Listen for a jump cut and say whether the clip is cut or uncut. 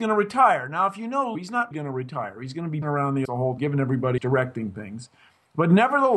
cut